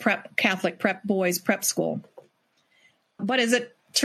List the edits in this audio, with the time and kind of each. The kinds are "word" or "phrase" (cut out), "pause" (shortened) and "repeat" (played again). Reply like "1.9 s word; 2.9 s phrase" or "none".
none